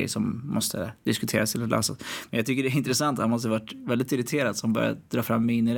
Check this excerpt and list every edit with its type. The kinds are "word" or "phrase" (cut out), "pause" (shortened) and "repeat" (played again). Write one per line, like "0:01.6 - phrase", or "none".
none